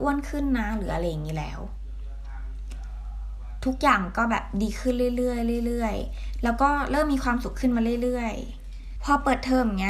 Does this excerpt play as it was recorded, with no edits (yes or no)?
no